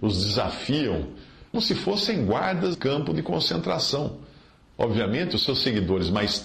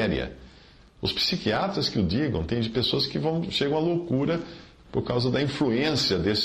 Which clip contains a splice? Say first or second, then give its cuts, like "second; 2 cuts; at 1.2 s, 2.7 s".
first; 2 cuts; at 1.5 s, 2.7 s